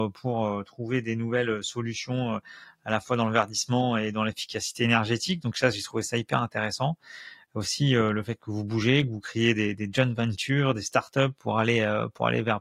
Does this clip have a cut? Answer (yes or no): no